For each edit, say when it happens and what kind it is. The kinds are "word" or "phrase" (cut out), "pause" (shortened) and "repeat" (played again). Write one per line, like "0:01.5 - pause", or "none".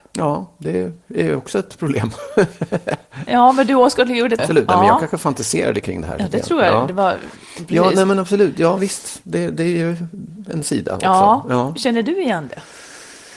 0:04.4 - phrase

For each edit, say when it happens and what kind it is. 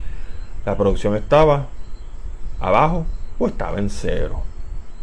none

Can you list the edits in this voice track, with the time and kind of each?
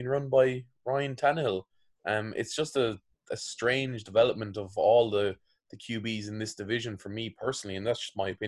none

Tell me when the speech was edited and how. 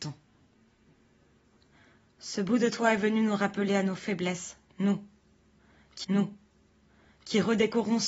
0:06.0 - repeat

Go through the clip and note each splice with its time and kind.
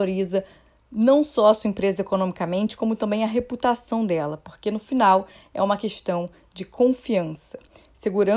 none

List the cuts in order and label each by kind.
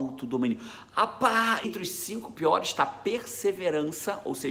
0:01.6 - word

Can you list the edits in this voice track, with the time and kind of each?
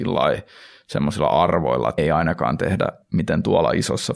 0:02.0 - word

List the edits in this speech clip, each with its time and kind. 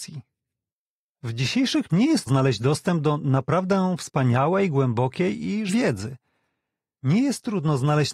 0:01.9 - word
0:02.3 - word
0:05.7 - word

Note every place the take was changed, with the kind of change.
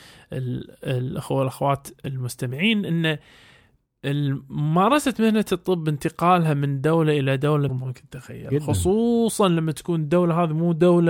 0:07.7 - phrase

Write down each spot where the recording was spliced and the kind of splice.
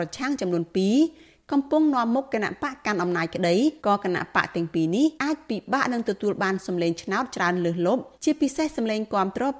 0:03.8 - pause
0:05.2 - pause
0:08.1 - pause

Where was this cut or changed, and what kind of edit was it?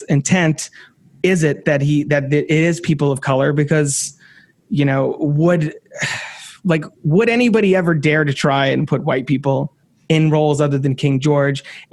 none

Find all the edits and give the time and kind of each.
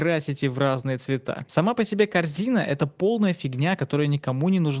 none

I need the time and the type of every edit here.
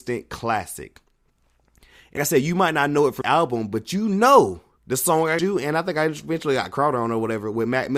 0:02.2 - word
0:03.2 - word
0:04.8 - pause
0:05.4 - word

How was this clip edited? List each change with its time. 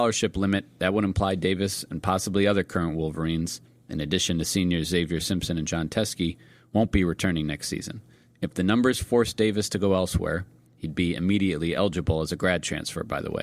none

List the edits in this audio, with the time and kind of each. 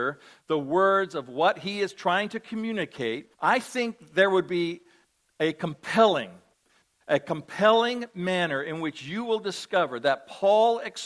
0:03.3 - pause

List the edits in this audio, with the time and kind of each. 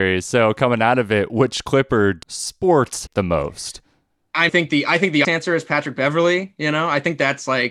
0:02.2 - word
0:03.1 - word
0:04.5 - phrase
0:05.2 - word

